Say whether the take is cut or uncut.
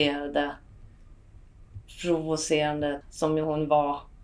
cut